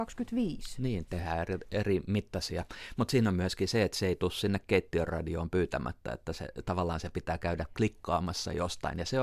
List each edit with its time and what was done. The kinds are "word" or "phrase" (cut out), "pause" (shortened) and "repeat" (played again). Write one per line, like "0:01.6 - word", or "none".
none